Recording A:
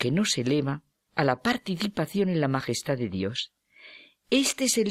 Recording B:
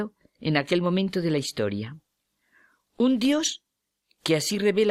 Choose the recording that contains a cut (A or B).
A